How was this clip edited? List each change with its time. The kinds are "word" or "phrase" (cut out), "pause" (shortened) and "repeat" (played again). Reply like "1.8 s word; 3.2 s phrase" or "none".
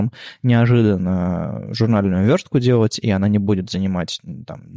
none